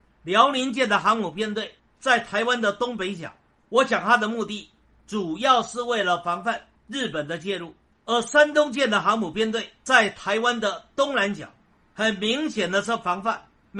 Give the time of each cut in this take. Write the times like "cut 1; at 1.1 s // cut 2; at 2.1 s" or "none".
none

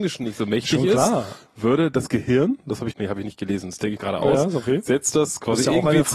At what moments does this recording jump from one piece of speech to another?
cut 1; at 2.9 s // cut 2; at 4.0 s

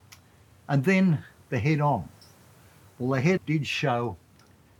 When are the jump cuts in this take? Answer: cut 1; at 3.4 s

